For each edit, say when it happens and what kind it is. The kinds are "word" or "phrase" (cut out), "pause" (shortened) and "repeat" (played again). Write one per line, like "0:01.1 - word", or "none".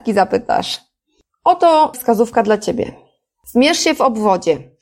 0:01.9 - word